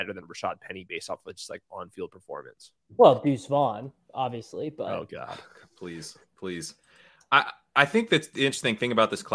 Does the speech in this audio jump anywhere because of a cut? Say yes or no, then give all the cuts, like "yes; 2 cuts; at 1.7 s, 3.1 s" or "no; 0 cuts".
no; 0 cuts